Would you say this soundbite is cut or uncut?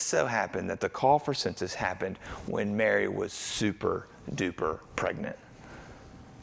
cut